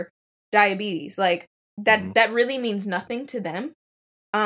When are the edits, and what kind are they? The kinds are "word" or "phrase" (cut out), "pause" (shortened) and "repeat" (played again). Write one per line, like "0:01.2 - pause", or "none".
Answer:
0:01.6 - pause